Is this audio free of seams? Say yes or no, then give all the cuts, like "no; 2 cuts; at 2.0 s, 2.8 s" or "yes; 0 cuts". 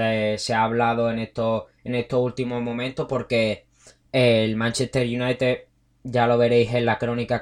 yes; 0 cuts